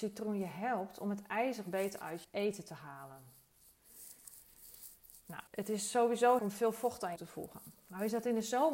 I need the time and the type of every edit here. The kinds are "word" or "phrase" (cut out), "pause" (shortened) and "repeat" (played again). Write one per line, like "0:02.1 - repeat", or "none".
0:02.2 - word
0:05.5 - pause
0:06.4 - phrase
0:07.2 - phrase